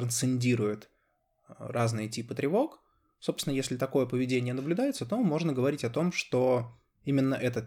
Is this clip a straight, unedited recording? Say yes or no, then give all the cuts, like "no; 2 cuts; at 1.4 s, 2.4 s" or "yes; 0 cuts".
yes; 0 cuts